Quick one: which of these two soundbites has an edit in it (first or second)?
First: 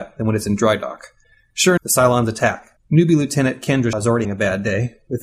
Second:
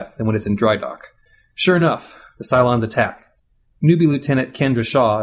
first